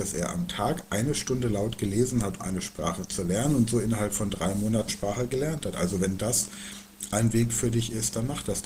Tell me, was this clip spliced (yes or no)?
yes